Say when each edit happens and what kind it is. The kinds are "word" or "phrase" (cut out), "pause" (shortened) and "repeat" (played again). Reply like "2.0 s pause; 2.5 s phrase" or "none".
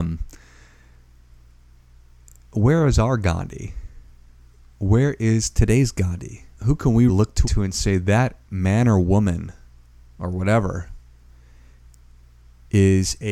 6.5 s pause; 7.1 s word; 7.4 s phrase; 8.4 s pause